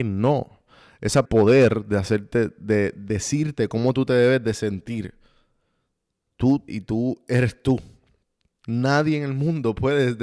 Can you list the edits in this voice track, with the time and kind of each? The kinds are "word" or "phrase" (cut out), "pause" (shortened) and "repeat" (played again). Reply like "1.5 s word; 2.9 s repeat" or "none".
1.2 s phrase; 6.7 s word

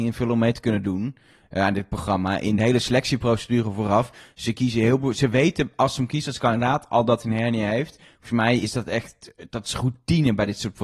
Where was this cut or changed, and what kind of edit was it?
none

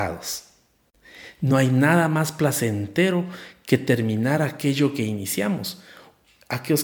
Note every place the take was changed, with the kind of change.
none

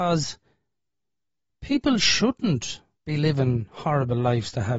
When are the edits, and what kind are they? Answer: 2.9 s pause

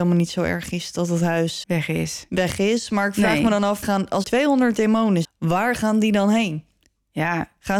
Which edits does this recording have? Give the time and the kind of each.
1.6 s word; 3.8 s word; 4.2 s word; 5.2 s word

